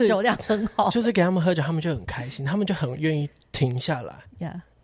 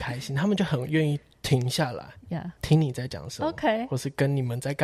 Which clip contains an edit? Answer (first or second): second